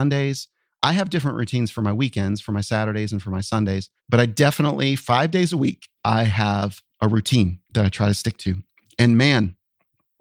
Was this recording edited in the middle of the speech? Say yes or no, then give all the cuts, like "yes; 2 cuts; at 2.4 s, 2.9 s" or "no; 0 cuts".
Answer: yes; 4 cuts; at 4.0 s, 6.0 s, 6.9 s, 7.6 s